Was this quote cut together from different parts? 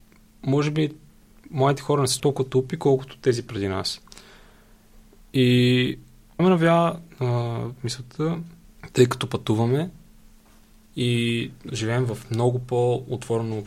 yes; 3 cuts; at 2.2 s, 6.4 s, 11.7 s

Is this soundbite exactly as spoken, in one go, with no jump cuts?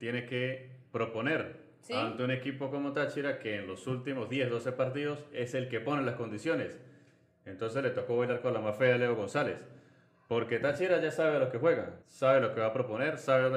no; 1 cut; at 12.0 s

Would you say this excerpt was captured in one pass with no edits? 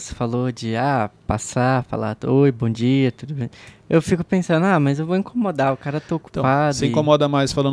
yes; 0 cuts

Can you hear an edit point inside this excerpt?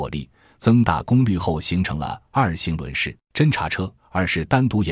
yes; 2 cuts; at 3.2 s, 4.0 s

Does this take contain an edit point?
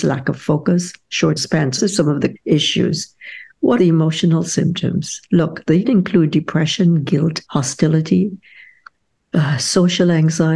yes; 6 cuts; at 1.4 s, 1.8 s, 2.4 s, 3.8 s, 5.8 s, 7.4 s

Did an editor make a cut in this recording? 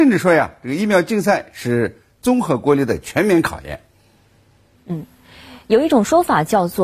no; 0 cuts

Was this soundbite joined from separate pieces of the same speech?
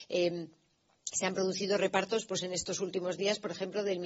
no; 0 cuts

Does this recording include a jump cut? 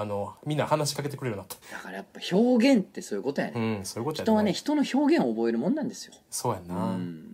yes; 1 cut; at 1.6 s

